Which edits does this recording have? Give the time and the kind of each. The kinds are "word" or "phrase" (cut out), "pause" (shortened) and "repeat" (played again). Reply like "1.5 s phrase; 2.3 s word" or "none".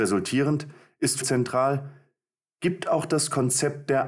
1.2 s phrase